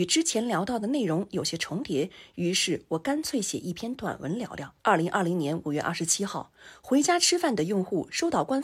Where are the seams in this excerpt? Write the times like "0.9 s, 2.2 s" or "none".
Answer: 4.8 s